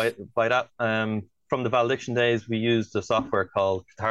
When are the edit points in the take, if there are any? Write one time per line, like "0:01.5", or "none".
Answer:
none